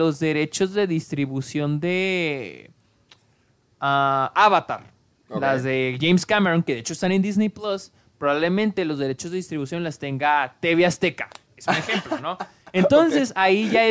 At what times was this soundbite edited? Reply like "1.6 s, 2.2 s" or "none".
none